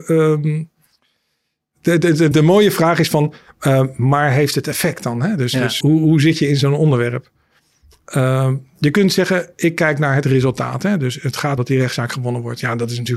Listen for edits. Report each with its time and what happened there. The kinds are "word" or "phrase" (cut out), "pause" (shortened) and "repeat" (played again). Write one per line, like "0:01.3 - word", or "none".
0:02.3 - word
0:05.8 - word
0:11.6 - word